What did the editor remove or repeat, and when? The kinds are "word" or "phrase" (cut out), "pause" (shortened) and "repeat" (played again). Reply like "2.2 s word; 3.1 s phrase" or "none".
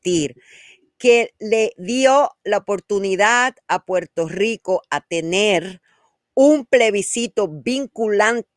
none